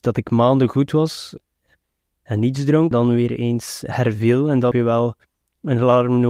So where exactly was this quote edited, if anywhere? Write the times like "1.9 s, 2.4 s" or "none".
2.9 s, 4.7 s